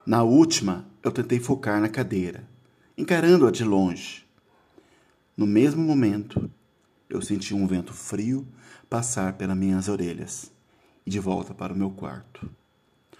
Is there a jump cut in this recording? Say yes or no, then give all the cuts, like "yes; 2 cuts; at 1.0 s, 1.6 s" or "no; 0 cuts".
yes; 1 cut; at 11.1 s